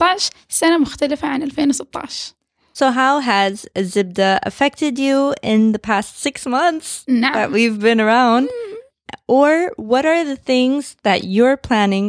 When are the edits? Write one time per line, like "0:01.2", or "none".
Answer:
none